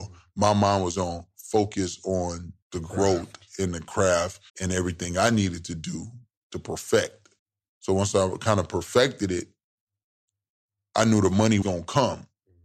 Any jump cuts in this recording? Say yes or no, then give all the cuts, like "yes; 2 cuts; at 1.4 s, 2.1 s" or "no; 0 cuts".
yes; 5 cuts; at 0.9 s, 2.6 s, 4.5 s, 7.4 s, 11.6 s